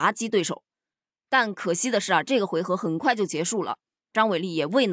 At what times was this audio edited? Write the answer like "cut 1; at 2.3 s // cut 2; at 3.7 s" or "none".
none